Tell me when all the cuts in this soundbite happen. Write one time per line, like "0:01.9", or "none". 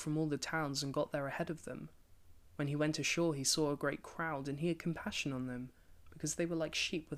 none